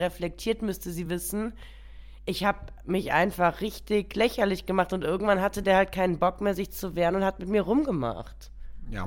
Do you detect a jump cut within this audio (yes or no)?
no